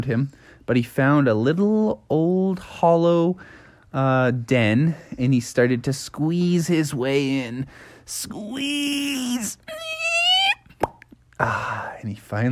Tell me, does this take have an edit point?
no; 0 cuts

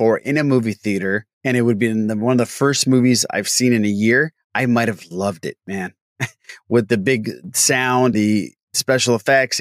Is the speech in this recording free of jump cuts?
no; 2 cuts; at 1.3 s, 8.1 s

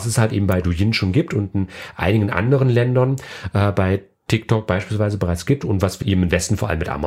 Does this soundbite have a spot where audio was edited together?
yes; 1 cut; at 6.0 s

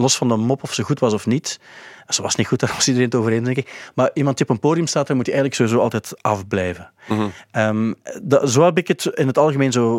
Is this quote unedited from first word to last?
yes; 0 cuts

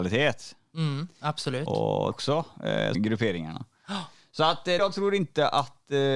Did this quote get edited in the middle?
yes; 3 cuts; at 2.1 s, 2.9 s, 4.8 s

